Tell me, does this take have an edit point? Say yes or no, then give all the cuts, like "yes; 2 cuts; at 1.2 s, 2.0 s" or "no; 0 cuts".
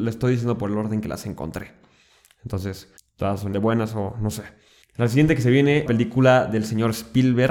yes; 4 cuts; at 3.0 s, 3.5 s, 4.8 s, 5.9 s